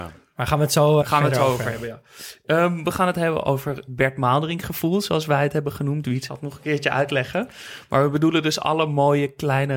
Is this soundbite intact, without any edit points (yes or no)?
no